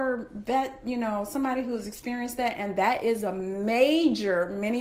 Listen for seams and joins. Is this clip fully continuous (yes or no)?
yes